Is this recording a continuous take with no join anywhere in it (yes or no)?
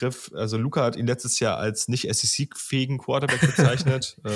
yes